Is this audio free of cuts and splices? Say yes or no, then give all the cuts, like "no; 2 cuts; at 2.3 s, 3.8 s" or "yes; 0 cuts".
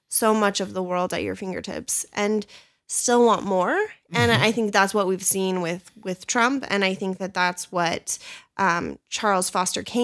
yes; 0 cuts